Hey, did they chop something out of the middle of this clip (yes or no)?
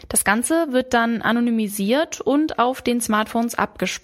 no